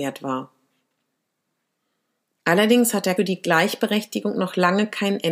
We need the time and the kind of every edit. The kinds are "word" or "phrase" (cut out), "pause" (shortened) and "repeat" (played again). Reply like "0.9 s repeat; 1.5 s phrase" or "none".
3.2 s word